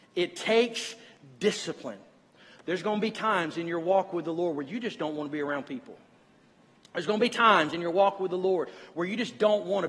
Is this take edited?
no; 0 cuts

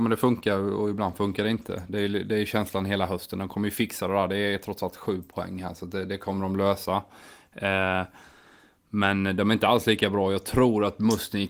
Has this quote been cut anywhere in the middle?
no; 0 cuts

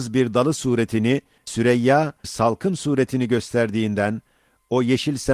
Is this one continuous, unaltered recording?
no; 2 cuts; at 1.5 s, 2.2 s

